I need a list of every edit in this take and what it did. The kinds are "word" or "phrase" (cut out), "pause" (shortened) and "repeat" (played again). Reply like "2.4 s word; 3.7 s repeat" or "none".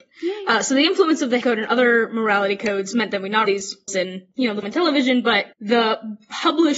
1.4 s word; 3.4 s phrase; 3.9 s word; 4.6 s word; 5.5 s pause